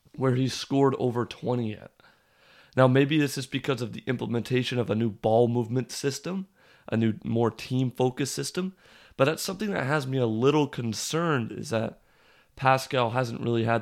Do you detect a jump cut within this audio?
no; 0 cuts

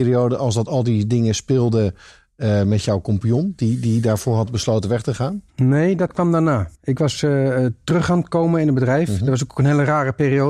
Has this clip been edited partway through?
yes; 1 cut; at 6.7 s

